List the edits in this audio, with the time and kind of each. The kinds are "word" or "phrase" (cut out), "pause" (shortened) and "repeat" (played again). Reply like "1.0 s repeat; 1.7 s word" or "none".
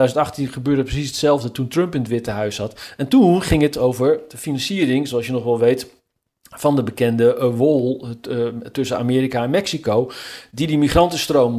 none